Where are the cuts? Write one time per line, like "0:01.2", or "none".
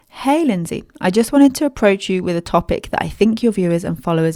none